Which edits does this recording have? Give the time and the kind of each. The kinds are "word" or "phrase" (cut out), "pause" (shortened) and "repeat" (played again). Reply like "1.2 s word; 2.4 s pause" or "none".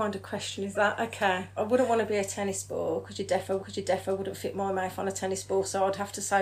1.6 s word; 3.6 s repeat